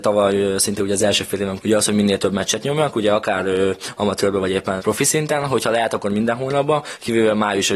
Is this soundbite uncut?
no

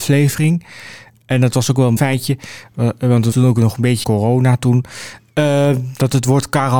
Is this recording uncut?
no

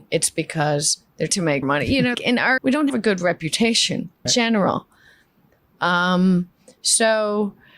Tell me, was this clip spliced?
yes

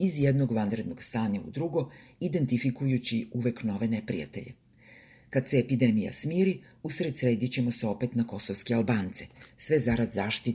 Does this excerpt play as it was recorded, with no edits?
yes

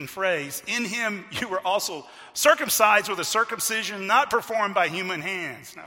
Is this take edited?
no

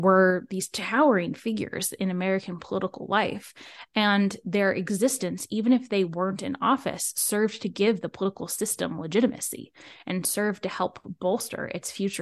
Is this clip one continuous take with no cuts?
yes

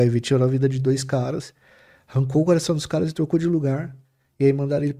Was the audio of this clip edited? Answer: no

